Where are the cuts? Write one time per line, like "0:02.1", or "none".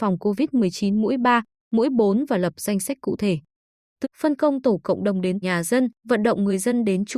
0:04.0
0:05.4
0:06.0